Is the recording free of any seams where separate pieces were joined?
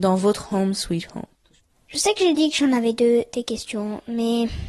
yes; 0 cuts

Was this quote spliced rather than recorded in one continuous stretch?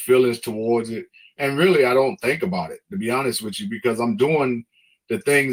no; 0 cuts

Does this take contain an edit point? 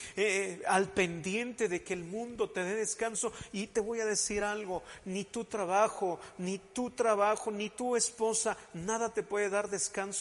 no; 0 cuts

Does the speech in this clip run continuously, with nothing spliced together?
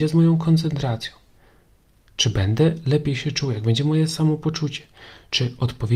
yes; 0 cuts

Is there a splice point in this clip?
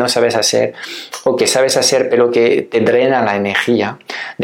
no; 0 cuts

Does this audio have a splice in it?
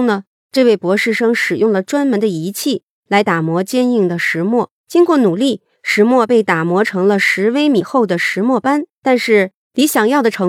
yes; 2 cuts; at 4.8 s, 9.0 s

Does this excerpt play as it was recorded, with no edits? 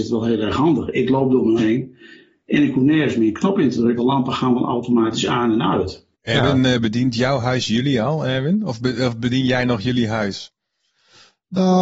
no; 3 cuts; at 1.6 s, 4.0 s, 6.1 s

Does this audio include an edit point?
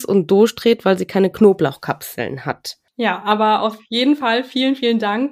no; 0 cuts

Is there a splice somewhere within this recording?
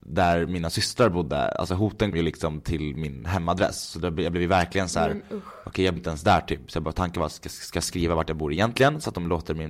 yes; 2 cuts; at 2.1 s, 6.0 s

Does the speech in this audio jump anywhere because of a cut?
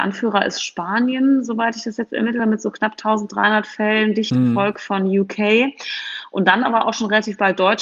no; 0 cuts

